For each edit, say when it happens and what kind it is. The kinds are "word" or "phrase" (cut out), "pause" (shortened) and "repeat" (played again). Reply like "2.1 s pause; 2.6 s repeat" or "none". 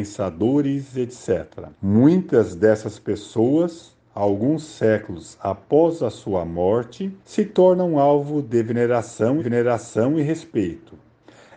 1.7 s pause; 7.2 s pause; 9.4 s repeat